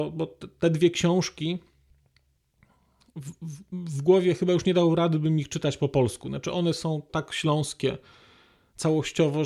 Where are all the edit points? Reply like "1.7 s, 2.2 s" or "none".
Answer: 7.1 s